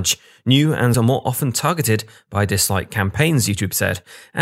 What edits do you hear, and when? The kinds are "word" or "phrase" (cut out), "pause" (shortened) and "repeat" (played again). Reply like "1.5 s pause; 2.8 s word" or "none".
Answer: 0.9 s phrase